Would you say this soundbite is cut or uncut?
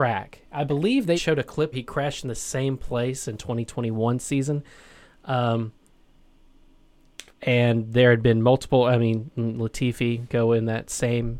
cut